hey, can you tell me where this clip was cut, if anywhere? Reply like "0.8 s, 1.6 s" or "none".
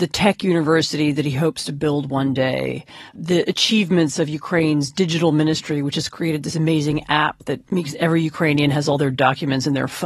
3.1 s